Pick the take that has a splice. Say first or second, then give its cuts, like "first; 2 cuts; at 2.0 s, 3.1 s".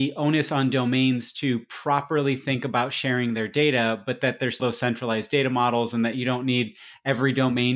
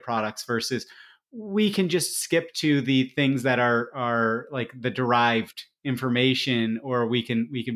first; 1 cut; at 4.6 s